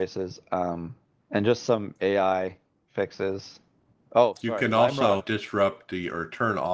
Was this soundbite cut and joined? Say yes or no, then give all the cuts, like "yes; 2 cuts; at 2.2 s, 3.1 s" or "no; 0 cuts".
yes; 1 cut; at 5.2 s